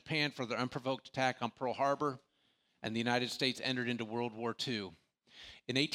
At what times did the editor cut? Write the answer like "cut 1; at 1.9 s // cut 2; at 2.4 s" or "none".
none